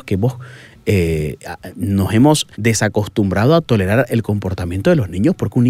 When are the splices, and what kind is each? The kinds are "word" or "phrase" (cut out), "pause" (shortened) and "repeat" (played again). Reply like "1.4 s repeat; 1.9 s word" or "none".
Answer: 2.5 s pause